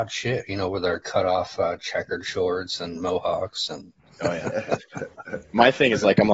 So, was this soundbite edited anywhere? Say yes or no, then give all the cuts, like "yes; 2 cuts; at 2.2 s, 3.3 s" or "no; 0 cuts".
no; 0 cuts